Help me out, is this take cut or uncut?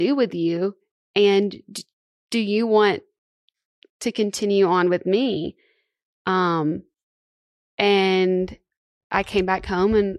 uncut